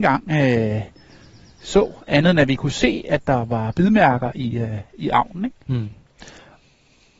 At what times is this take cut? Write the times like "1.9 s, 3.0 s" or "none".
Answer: none